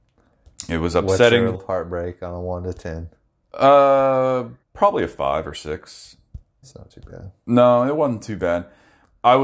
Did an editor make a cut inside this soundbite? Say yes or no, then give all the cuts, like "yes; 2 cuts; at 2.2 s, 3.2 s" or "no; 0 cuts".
yes; 3 cuts; at 1.5 s, 4.6 s, 6.6 s